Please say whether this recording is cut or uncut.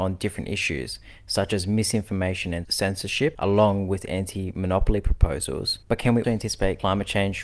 cut